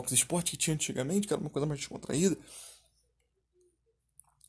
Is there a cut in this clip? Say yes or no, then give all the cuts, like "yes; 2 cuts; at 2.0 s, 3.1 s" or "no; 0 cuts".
no; 0 cuts